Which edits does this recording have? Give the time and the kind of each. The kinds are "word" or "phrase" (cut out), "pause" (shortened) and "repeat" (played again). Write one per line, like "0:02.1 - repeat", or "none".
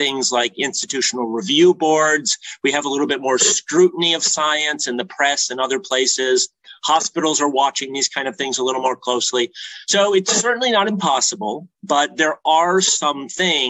none